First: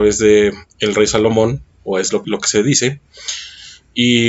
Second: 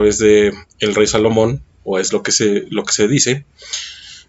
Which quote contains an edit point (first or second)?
first